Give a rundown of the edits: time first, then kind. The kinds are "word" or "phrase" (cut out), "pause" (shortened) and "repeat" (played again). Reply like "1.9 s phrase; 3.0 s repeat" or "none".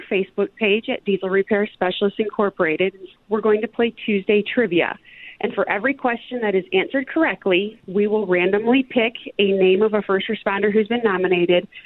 none